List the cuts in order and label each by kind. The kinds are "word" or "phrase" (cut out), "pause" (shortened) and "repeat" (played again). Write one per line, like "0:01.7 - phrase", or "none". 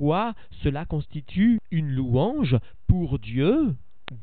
none